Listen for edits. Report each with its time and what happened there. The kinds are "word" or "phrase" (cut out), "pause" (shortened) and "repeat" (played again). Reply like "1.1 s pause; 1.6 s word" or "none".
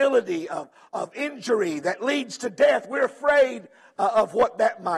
none